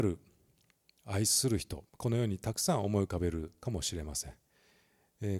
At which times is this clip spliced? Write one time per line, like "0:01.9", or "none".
0:01.9

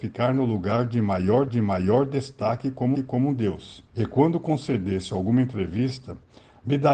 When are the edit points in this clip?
0:01.5
0:02.9
0:03.9

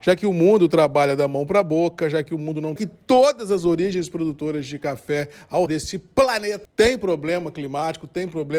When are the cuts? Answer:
0:02.8
0:05.7
0:06.6

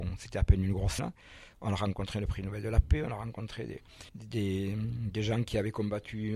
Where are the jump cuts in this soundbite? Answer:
0:01.0
0:04.1

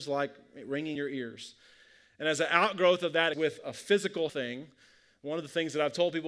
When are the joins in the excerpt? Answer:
0:01.0
0:03.3
0:04.3

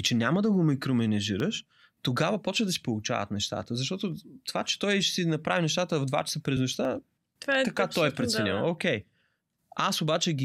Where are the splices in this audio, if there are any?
none

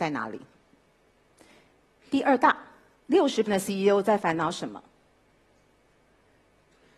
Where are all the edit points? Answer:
0:03.5

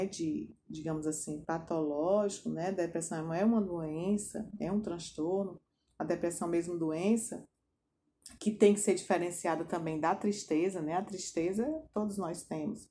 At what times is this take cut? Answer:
none

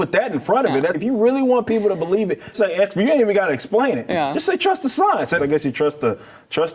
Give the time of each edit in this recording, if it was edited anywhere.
0:00.9
0:02.5
0:05.4

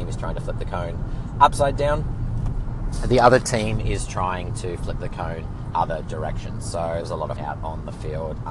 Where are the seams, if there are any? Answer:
0:05.7
0:07.0
0:07.4

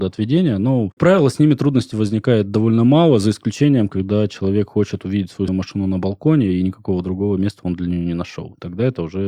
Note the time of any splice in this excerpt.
0:01.0
0:05.5

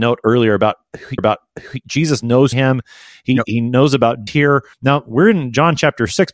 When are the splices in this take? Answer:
0:01.2
0:02.5
0:04.3
0:04.7

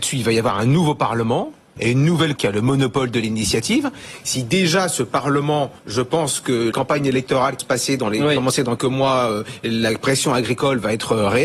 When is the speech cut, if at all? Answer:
0:02.4
0:05.8
0:06.7
0:07.6
0:08.8

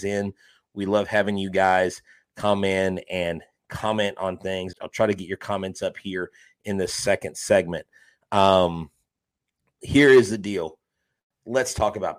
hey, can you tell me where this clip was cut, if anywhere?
0:04.7

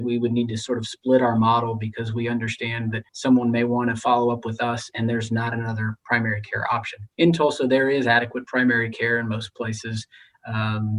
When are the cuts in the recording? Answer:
0:03.1
0:07.1

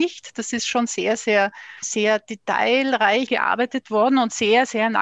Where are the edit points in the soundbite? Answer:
0:01.8
0:03.3

